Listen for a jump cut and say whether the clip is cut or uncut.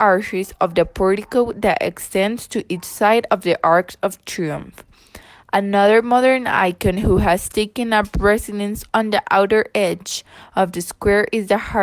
uncut